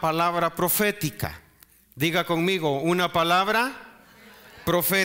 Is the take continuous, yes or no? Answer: yes